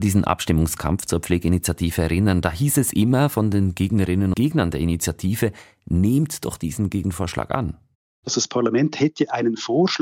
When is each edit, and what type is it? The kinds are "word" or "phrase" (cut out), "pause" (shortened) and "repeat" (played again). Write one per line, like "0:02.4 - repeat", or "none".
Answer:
0:04.3 - word